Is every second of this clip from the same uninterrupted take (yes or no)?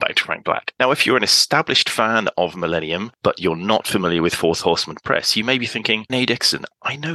no